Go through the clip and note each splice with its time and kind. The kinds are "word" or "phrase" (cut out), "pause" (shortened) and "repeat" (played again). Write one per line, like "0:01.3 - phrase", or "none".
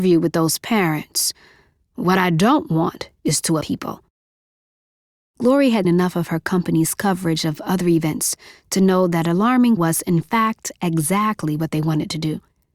0:03.6 - word
0:05.8 - word
0:09.8 - word